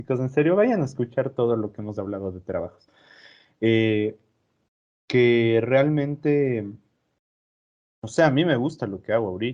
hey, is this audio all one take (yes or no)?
yes